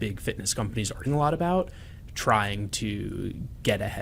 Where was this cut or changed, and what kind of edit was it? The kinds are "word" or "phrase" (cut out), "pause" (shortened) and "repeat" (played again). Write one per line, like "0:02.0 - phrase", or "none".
0:01.1 - word
0:02.1 - word